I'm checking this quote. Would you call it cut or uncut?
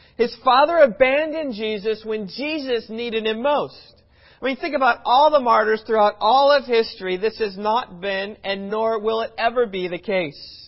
uncut